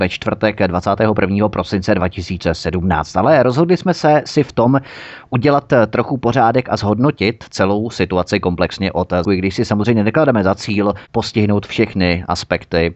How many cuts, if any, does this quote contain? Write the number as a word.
one